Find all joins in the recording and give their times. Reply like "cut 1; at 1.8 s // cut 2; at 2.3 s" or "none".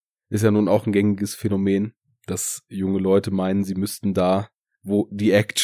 none